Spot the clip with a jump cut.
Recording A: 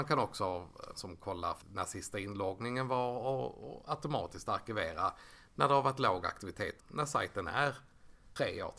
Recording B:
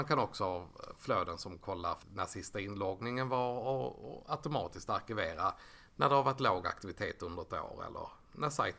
A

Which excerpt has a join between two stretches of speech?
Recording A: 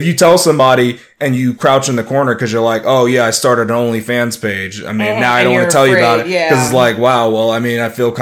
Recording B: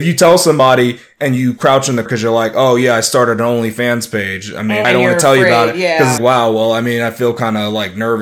B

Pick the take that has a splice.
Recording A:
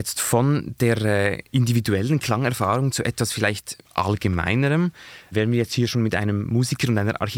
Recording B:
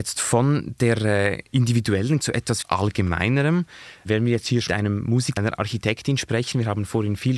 B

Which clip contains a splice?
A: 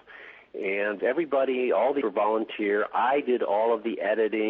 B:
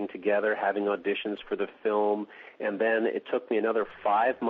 A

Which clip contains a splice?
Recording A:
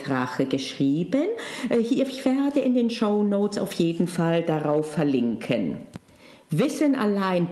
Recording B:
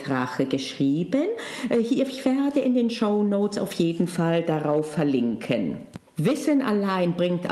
B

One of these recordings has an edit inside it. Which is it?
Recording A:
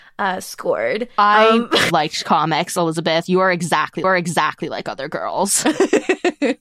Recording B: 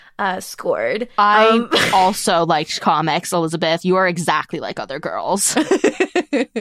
A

